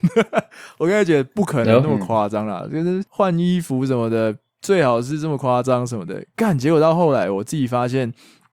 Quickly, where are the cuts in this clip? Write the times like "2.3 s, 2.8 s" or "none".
3.1 s